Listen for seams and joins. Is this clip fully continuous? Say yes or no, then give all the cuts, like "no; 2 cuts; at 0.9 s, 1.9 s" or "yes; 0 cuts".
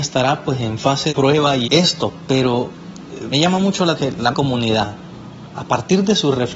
no; 5 cuts; at 1.1 s, 1.6 s, 3.3 s, 3.9 s, 4.3 s